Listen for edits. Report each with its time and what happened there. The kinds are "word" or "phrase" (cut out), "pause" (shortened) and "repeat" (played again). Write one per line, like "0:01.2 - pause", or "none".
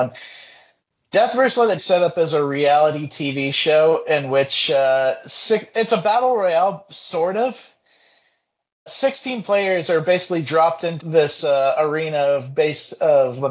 0:01.8 - phrase
0:05.7 - word
0:08.9 - word
0:11.0 - word